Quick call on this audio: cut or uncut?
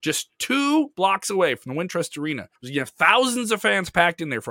cut